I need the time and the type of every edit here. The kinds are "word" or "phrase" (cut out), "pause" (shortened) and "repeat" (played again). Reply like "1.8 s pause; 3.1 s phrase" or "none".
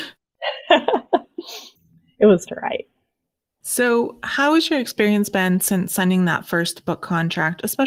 2.5 s word